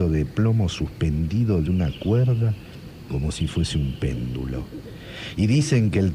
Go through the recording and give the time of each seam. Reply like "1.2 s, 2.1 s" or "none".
none